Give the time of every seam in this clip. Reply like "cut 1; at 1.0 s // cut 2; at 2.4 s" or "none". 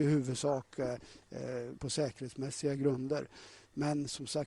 cut 1; at 1.8 s